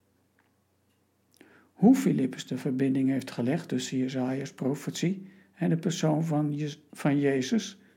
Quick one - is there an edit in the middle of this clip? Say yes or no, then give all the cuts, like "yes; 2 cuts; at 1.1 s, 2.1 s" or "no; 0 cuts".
no; 0 cuts